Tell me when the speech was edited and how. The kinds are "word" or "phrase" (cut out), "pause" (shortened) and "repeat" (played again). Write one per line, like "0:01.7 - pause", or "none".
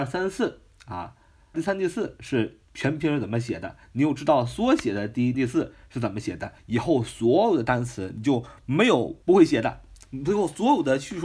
0:01.5 - phrase
0:02.6 - pause
0:05.3 - phrase
0:06.6 - pause
0:09.2 - pause